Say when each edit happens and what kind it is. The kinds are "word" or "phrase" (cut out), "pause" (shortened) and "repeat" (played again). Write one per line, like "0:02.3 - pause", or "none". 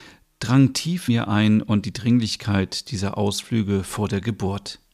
0:01.1 - word
0:01.8 - word